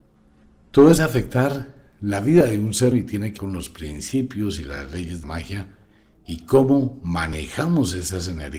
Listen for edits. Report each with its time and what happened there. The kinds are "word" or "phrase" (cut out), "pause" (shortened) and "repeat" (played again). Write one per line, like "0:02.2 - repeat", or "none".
0:01.0 - word
0:02.9 - word
0:03.4 - word
0:05.2 - word